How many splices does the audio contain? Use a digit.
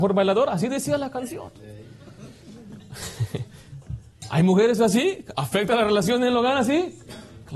0